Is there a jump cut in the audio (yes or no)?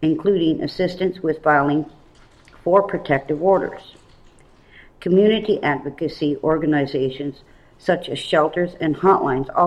no